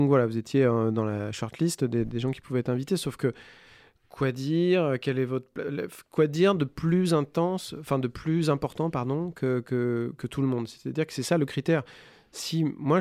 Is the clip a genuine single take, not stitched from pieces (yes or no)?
yes